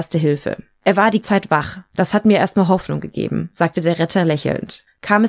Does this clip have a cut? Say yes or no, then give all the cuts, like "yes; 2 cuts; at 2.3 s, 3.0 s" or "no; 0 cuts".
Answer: yes; 1 cut; at 1.2 s